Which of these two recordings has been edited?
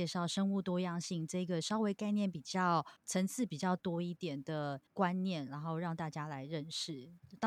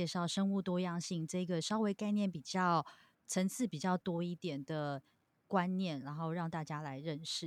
first; 2 cuts; at 3.0 s, 4.9 s

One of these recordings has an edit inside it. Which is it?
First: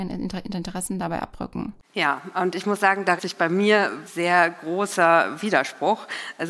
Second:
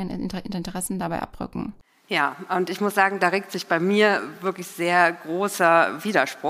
first; 3 cuts; at 1.8 s, 3.2 s, 4.1 s

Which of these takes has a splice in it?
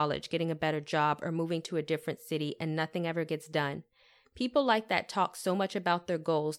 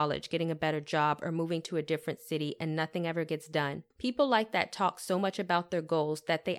second; 1 cut; at 3.9 s

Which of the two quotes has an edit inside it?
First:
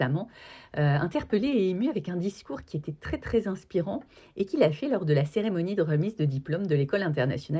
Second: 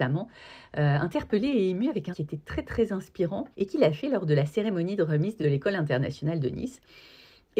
second; 3 cuts; at 2.1 s, 3.5 s, 5.4 s

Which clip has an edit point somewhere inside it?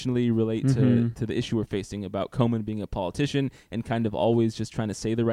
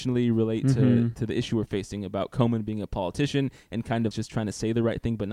second; 1 cut; at 4.1 s

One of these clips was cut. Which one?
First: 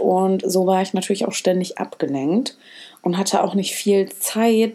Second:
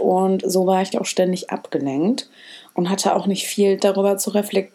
second; 2 cuts; at 0.9 s, 3.8 s

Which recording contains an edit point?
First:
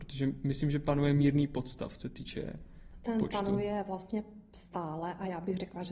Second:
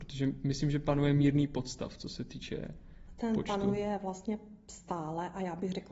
first; 1 cut; at 2.0 s

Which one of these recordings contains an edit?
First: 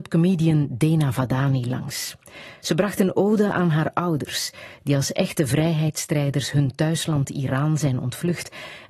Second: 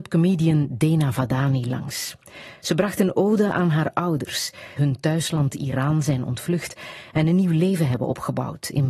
second; 1 cut; at 4.8 s

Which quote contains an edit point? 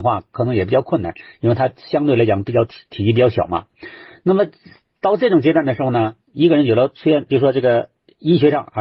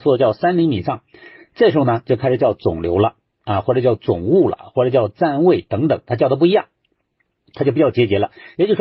first; 1 cut; at 7.3 s

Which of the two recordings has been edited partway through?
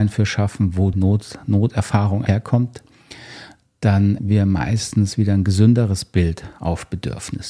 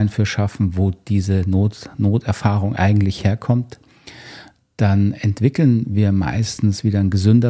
first; 3 cuts; at 0.9 s, 2.3 s, 4.2 s

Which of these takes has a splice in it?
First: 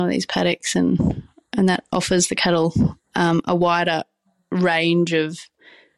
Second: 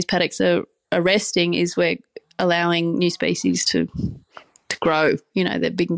first; 1 cut; at 3.0 s

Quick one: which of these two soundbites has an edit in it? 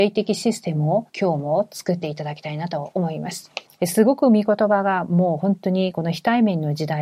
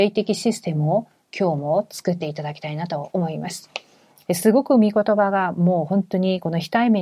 first; 2 cuts; at 1.1 s, 3.7 s

